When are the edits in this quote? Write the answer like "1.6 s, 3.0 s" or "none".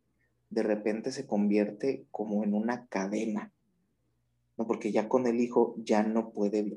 none